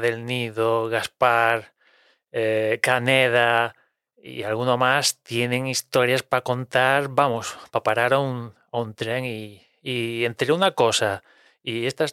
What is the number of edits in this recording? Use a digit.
0